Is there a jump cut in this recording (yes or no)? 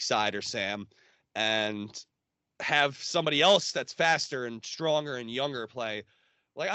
no